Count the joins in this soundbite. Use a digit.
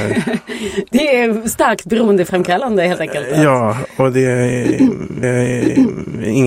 1